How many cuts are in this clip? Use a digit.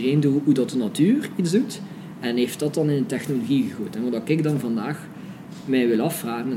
0